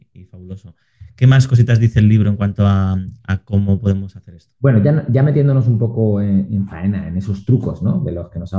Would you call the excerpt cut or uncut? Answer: uncut